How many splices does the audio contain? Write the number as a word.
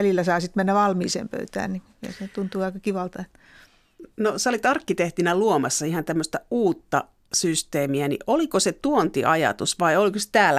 zero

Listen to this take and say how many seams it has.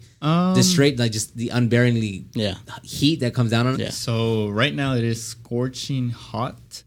one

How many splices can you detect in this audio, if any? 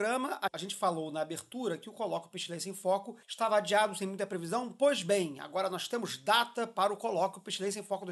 one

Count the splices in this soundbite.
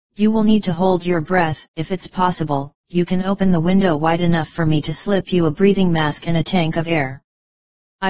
two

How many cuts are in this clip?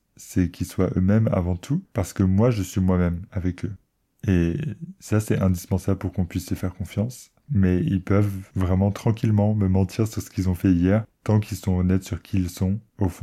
zero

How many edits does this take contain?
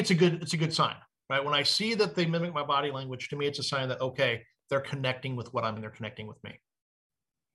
one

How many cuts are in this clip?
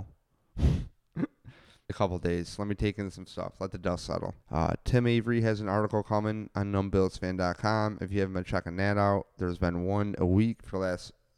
two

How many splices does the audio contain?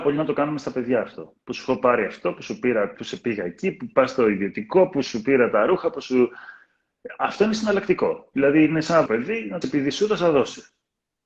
three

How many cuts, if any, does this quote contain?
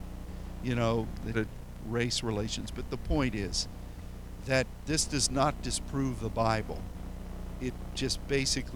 three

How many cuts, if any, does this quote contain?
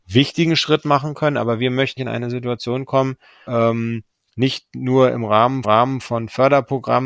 three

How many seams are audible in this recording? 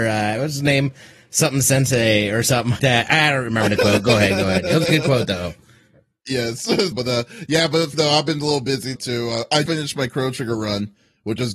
five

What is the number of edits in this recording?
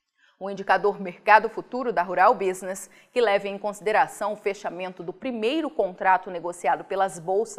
zero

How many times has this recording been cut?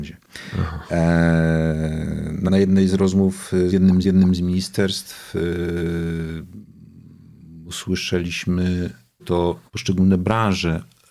five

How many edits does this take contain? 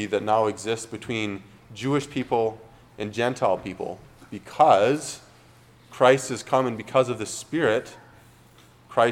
zero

